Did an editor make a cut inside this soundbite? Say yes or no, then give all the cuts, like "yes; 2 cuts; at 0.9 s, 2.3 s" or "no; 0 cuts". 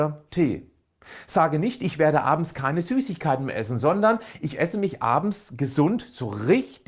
no; 0 cuts